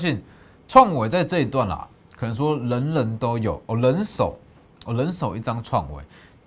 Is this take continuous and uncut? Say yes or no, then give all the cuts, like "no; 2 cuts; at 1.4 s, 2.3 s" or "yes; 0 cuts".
yes; 0 cuts